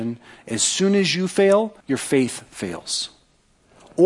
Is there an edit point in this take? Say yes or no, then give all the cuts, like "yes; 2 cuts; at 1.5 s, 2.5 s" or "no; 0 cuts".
yes; 1 cut; at 1.8 s